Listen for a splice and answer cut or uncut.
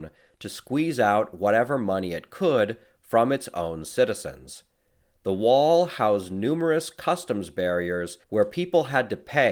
cut